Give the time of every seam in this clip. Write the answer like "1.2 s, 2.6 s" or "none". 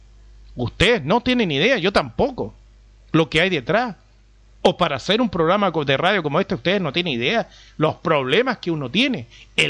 none